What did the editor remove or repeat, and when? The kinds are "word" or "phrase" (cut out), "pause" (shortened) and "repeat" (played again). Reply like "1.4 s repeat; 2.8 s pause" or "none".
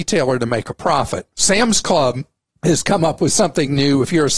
1.3 s pause

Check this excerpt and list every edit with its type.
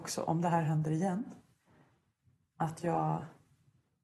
none

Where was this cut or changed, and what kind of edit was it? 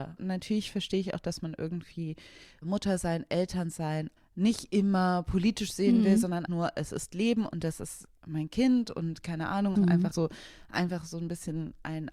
4.2 s phrase; 6.5 s word; 9.8 s phrase; 10.1 s word

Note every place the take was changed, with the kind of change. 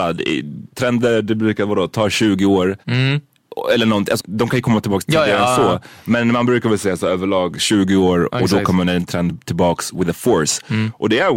2.8 s pause; 4.2 s word

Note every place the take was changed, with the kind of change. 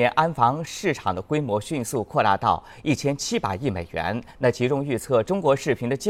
4.3 s pause

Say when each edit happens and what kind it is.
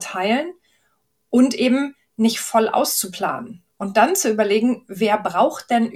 none

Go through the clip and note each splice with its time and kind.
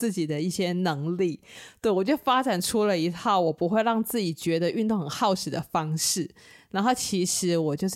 none

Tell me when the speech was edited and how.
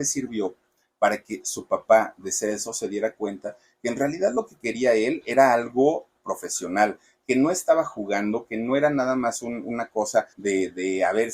10.3 s pause

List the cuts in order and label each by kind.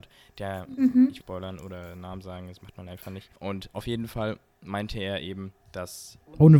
1.2 s phrase; 3.4 s pause; 5.6 s pause

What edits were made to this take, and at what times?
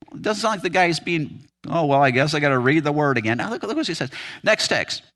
none

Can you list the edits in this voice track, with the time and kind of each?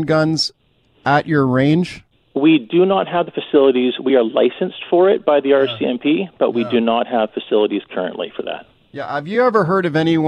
none

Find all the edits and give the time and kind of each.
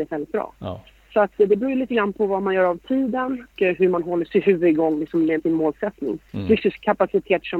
3.5 s word; 4.3 s word; 5.4 s word; 6.6 s word

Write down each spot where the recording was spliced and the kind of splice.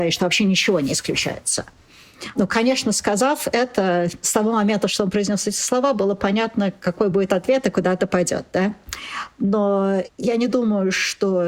none

